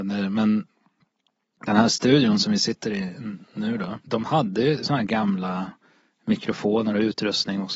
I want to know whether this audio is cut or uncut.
uncut